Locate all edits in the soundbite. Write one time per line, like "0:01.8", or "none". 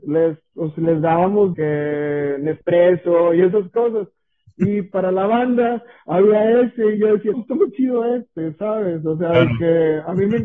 0:01.5
0:07.3